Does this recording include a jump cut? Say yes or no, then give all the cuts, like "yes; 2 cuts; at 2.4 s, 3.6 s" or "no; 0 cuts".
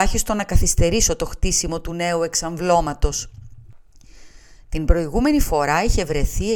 no; 0 cuts